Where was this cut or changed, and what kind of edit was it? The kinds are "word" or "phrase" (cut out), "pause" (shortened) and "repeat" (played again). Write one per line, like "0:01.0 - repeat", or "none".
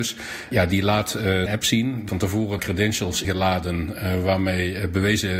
0:01.5 - word
0:02.1 - word
0:02.6 - word
0:03.2 - word